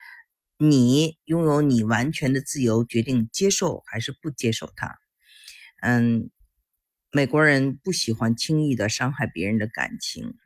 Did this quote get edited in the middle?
no; 0 cuts

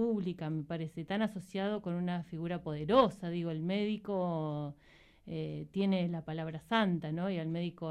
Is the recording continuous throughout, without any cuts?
yes; 0 cuts

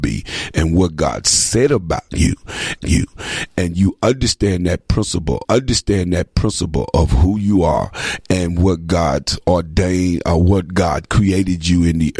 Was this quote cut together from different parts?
yes; 2 cuts; at 2.8 s, 5.4 s

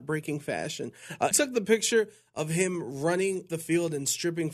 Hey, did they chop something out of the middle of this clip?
yes; 2 cuts; at 1.3 s, 3.5 s

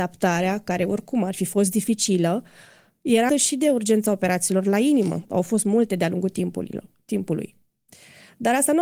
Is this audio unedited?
no; 2 cuts; at 3.3 s, 5.3 s

